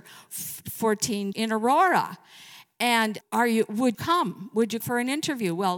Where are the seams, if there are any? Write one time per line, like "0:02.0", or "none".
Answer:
0:01.3
0:03.2
0:03.9
0:04.8